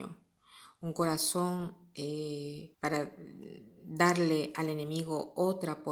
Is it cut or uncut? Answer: cut